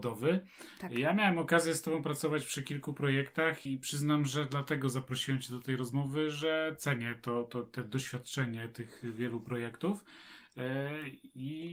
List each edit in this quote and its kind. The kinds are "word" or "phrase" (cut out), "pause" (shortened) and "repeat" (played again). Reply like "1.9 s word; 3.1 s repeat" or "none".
3.6 s word